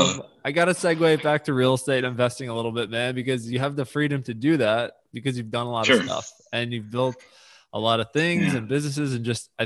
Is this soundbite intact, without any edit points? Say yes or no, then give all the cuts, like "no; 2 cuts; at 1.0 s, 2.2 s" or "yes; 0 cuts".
yes; 0 cuts